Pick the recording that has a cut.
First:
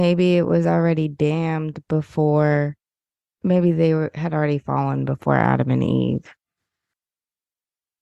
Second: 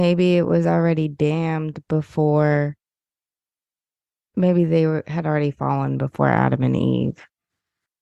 first; 1 cut; at 3.2 s

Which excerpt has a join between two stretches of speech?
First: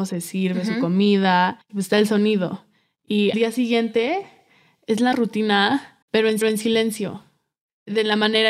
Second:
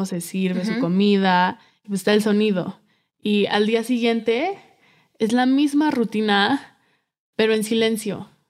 first; 5 cuts; at 1.6 s, 3.3 s, 5.1 s, 6.0 s, 6.4 s

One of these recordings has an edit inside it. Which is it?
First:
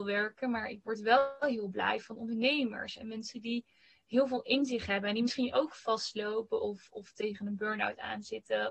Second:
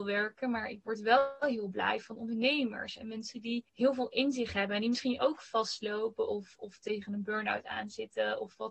second; 1 cut; at 3.7 s

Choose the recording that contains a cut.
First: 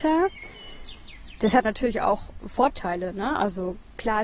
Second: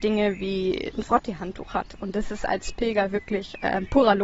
first; 1 cut; at 1.6 s

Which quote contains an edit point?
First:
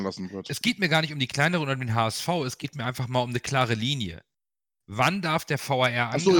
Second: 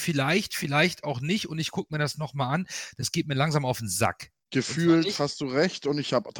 second; 1 cut; at 4.4 s

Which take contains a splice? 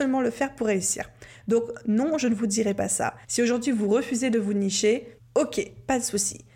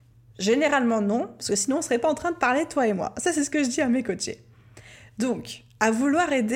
first; 2 cuts; at 3.2 s, 5.2 s

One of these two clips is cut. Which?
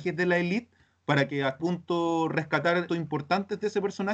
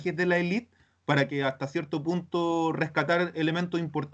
first; 2 cuts; at 1.6 s, 2.9 s

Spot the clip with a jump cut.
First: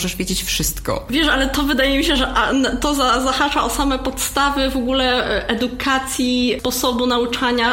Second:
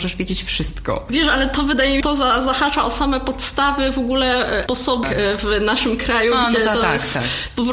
second; 3 cuts; at 2.0 s, 4.7 s, 5.0 s

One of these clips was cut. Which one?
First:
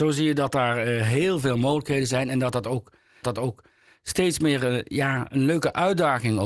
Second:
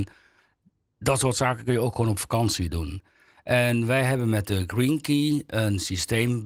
first; 1 cut; at 3.2 s

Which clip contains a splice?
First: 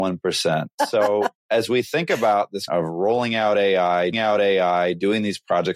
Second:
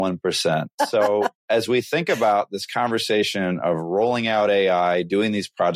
first; 2 cuts; at 2.7 s, 4.1 s

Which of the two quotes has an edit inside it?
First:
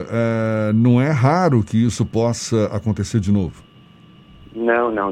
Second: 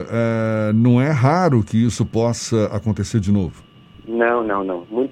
second; 1 cut; at 3.9 s

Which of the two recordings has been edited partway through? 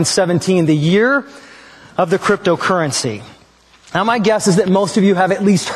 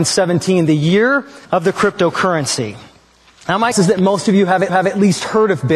second; 3 cuts; at 1.4 s, 3.7 s, 4.7 s

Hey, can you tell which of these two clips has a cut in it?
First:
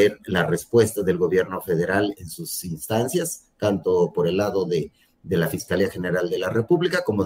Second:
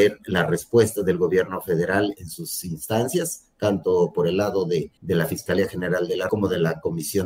second; 2 cuts; at 5.0 s, 6.3 s

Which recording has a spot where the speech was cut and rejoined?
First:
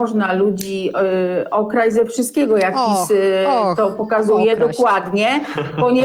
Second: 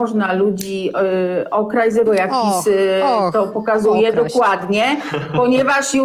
second; 1 cut; at 2.1 s

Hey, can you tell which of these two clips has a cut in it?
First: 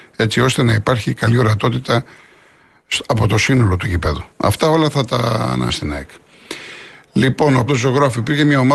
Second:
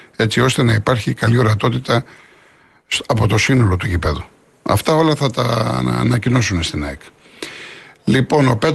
first; 3 cuts; at 4.3 s, 5.7 s, 7.7 s

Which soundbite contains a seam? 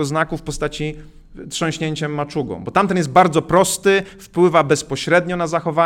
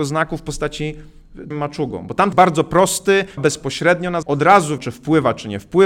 second; 5 cuts; at 1.5 s, 2.3 s, 3.4 s, 4.2 s, 4.8 s

